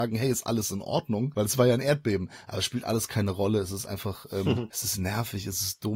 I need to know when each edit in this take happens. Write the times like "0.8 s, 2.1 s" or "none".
none